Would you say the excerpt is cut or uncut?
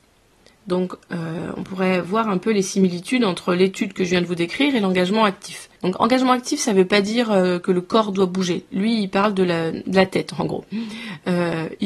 cut